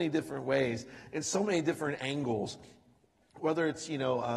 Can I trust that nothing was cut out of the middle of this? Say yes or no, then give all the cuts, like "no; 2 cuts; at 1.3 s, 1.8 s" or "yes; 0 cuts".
yes; 0 cuts